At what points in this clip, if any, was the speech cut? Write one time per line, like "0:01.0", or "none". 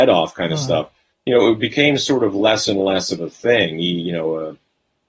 0:01.1